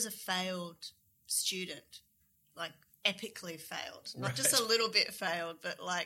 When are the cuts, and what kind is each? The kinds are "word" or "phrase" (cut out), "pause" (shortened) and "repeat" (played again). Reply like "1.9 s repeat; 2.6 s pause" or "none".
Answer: none